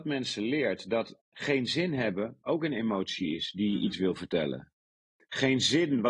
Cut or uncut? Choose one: uncut